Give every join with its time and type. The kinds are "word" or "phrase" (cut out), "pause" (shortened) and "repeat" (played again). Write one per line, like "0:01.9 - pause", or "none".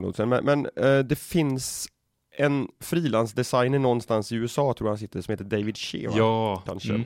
none